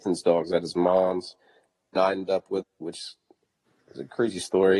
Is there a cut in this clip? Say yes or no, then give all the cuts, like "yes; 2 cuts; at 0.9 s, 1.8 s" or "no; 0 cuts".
yes; 2 cuts; at 2.0 s, 2.6 s